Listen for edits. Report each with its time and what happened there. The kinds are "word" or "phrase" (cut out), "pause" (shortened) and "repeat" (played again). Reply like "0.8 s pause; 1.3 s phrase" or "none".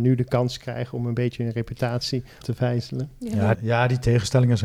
2.4 s word; 3.5 s phrase

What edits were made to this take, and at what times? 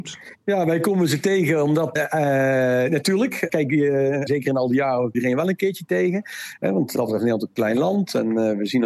2.0 s word; 3.5 s word; 4.3 s word; 5.1 s word; 7.0 s word

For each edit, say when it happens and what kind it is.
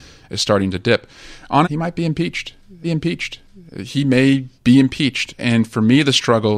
1.6 s word; 2.8 s repeat; 4.6 s pause; 5.4 s word

